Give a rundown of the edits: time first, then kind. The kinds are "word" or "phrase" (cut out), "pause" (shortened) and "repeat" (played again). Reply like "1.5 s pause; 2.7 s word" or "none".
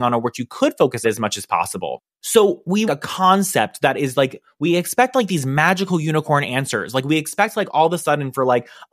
1.0 s phrase; 2.1 s pause; 2.9 s phrase